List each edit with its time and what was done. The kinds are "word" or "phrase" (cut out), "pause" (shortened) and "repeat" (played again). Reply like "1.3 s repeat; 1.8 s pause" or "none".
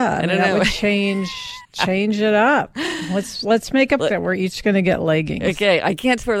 1.6 s pause; 4.0 s word